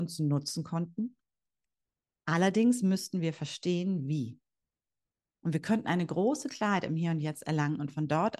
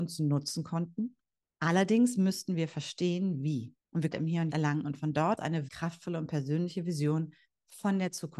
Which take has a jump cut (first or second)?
second